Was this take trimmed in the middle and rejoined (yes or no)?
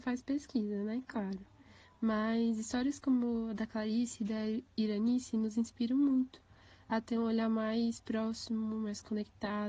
no